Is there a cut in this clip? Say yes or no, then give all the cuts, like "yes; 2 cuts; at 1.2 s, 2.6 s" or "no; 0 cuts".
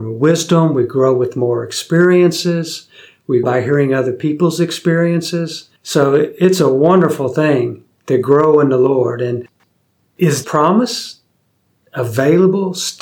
yes; 3 cuts; at 3.4 s, 5.8 s, 10.4 s